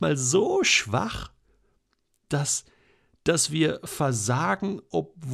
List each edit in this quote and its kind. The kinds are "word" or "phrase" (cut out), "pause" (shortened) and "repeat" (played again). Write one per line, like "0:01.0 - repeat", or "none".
none